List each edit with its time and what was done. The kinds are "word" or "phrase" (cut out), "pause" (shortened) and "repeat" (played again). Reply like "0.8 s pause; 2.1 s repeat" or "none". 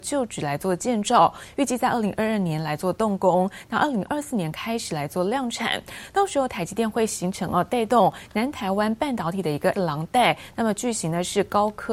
9.7 s word